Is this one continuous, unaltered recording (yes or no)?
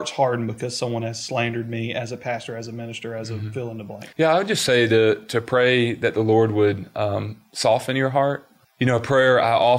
no